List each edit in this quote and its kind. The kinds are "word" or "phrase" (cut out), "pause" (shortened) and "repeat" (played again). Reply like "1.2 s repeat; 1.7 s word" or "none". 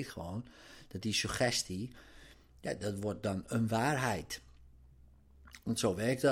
none